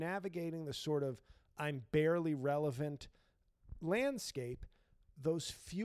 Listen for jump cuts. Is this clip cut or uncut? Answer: uncut